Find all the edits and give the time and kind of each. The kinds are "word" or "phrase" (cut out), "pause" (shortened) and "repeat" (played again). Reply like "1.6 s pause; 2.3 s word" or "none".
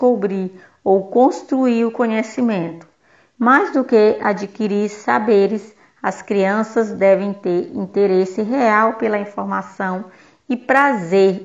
none